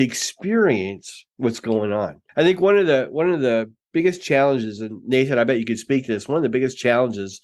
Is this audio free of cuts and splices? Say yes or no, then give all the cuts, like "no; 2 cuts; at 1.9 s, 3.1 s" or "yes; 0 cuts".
no; 2 cuts; at 1.3 s, 2.3 s